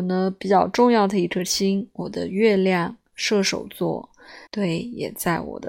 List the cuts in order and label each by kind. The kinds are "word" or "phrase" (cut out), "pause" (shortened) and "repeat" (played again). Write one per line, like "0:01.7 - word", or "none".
0:04.5 - pause